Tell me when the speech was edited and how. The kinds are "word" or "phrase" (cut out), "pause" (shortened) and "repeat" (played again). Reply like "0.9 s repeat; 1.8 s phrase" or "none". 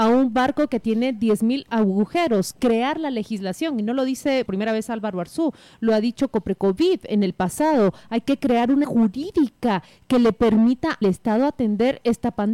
4.5 s word; 8.8 s word; 11.0 s word